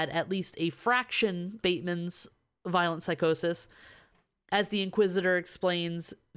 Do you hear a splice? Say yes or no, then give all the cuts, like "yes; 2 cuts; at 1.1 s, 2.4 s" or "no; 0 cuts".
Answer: yes; 1 cut; at 1.6 s